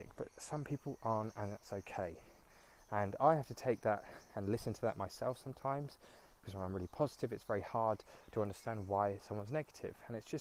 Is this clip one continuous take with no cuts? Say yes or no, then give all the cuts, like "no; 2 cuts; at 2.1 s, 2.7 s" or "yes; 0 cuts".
yes; 0 cuts